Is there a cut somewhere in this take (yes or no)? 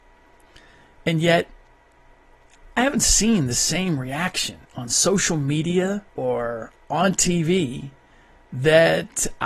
yes